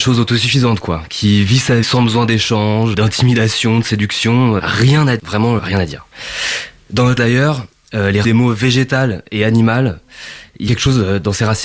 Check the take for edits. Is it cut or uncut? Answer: cut